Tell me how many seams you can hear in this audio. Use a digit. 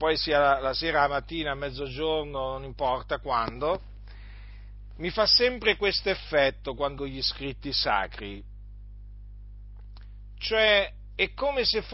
1